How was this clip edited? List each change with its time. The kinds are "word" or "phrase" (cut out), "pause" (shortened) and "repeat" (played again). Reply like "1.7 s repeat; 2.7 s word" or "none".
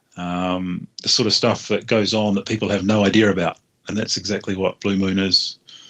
0.9 s pause